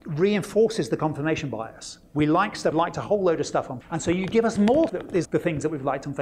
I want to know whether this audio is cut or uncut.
cut